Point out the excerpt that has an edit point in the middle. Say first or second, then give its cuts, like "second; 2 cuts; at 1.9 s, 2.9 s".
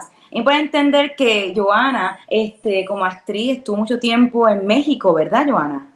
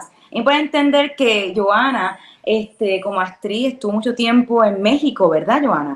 first; 1 cut; at 2.2 s